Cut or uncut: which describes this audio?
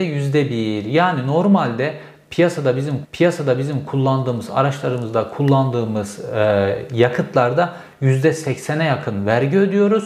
cut